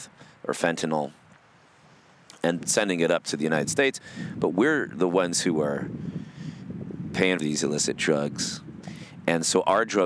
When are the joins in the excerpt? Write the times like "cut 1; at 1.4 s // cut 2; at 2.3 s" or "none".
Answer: cut 1; at 2.6 s // cut 2; at 7.4 s